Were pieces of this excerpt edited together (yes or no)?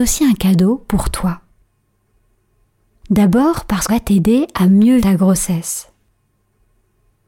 yes